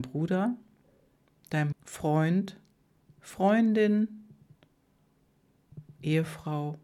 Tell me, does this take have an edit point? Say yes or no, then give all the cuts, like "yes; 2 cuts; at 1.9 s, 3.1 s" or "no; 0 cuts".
yes; 1 cut; at 1.7 s